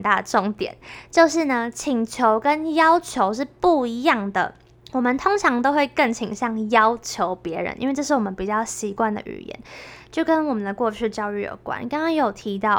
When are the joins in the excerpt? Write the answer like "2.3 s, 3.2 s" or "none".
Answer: 4.7 s